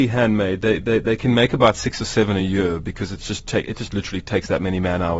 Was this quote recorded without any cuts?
yes; 0 cuts

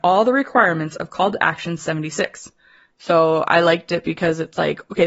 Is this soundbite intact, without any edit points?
yes; 0 cuts

